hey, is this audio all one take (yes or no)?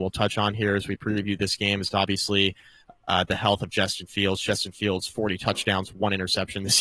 yes